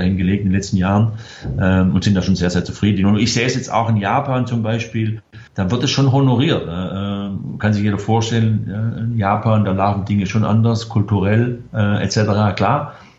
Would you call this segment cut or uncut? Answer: cut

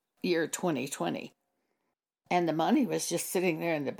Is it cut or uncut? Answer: uncut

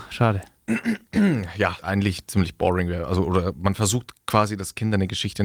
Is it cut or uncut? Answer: cut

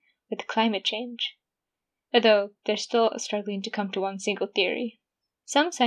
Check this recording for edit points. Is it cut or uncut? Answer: uncut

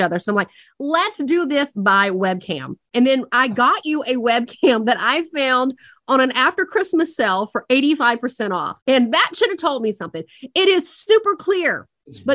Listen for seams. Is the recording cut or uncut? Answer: cut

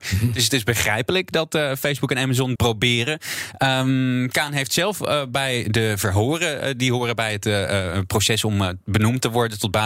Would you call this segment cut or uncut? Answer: cut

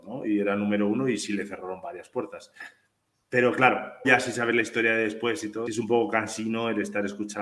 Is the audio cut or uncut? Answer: cut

